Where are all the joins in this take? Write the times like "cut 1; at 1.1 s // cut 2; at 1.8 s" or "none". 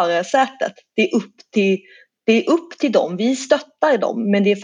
none